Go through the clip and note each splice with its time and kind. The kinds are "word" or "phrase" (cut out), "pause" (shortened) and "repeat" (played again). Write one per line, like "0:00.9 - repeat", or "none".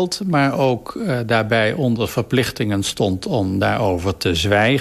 none